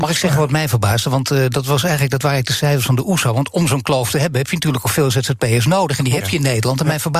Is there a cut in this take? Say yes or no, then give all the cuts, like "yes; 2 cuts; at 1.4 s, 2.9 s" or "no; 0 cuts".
no; 0 cuts